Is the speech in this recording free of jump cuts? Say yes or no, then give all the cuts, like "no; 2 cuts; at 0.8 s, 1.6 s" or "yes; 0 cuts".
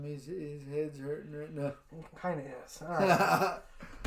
yes; 0 cuts